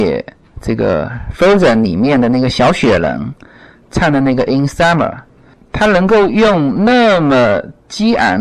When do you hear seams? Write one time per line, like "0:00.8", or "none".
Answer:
none